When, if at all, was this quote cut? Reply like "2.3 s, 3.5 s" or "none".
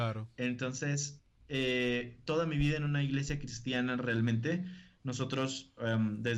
none